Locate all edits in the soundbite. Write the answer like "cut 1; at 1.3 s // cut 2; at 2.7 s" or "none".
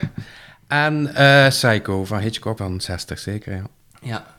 cut 1; at 2.6 s